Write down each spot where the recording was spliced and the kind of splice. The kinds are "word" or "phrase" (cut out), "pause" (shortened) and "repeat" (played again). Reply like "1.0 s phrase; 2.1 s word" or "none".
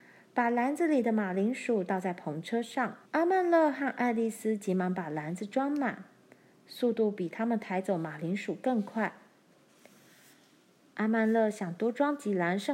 3.0 s pause